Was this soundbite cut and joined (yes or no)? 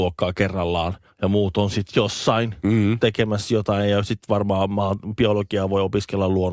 yes